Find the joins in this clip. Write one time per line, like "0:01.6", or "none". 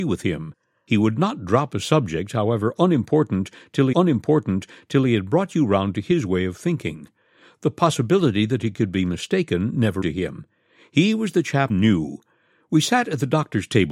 0:03.9
0:10.0
0:11.7